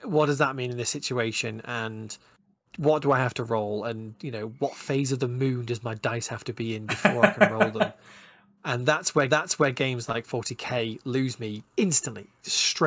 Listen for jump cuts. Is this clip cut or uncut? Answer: cut